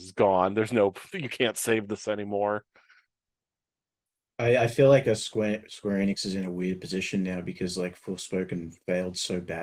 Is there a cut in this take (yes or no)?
no